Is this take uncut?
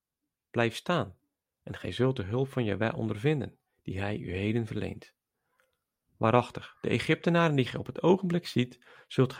yes; 0 cuts

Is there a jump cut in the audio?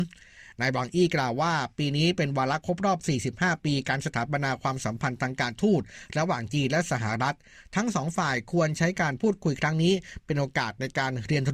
no; 0 cuts

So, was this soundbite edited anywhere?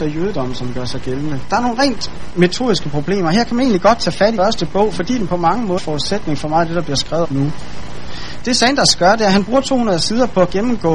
yes; 3 cuts; at 4.4 s, 5.8 s, 7.2 s

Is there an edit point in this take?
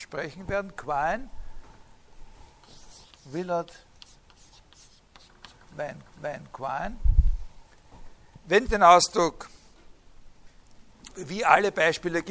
yes; 4 cuts; at 3.1 s, 6.1 s, 8.7 s, 11.1 s

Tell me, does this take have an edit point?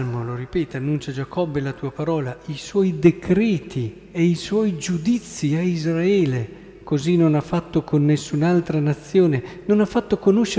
no; 0 cuts

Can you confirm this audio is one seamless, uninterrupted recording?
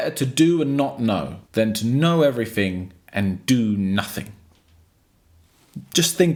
no; 1 cut; at 1.4 s

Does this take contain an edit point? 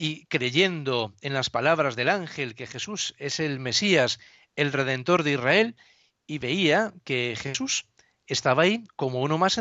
no; 0 cuts

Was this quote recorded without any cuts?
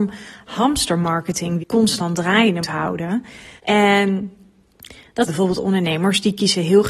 no; 4 cuts; at 1.6 s, 2.6 s, 3.6 s, 5.3 s

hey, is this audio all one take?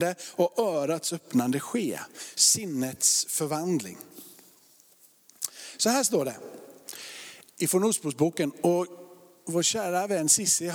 yes; 0 cuts

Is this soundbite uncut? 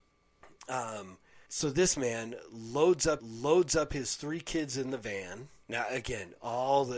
no; 3 cuts; at 1.5 s, 3.2 s, 5.6 s

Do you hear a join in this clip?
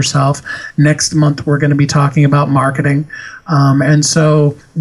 no; 0 cuts

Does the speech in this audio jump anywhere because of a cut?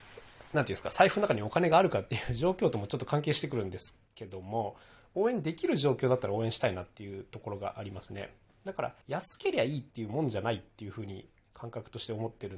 yes; 2 cuts; at 4.1 s, 9.0 s

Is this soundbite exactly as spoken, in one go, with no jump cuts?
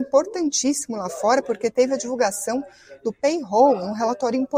yes; 0 cuts

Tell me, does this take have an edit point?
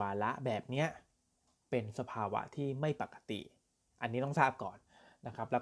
no; 0 cuts

